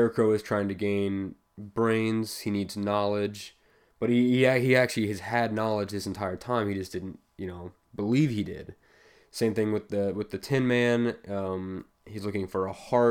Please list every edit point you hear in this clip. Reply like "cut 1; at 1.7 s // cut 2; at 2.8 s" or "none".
none